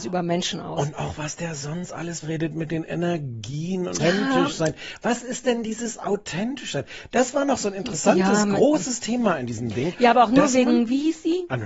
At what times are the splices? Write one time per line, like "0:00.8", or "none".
0:02.2
0:04.0